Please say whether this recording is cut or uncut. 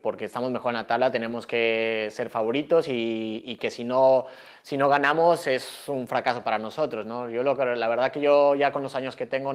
uncut